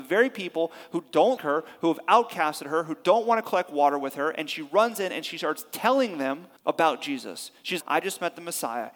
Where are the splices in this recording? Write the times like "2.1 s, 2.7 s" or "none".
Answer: 1.4 s, 6.6 s, 7.8 s